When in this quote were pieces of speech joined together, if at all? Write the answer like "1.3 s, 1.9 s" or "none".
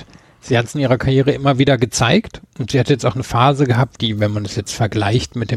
none